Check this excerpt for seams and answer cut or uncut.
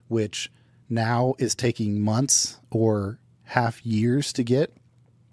uncut